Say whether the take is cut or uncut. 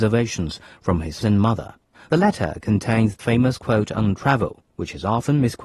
cut